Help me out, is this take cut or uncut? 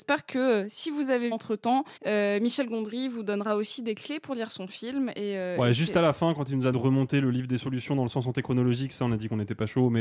cut